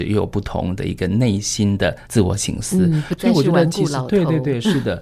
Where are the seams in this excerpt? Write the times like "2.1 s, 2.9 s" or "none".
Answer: 2.0 s